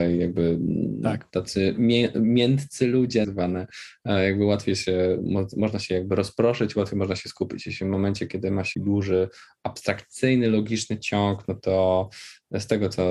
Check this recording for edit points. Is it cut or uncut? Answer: cut